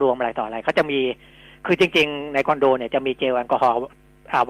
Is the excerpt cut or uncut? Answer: uncut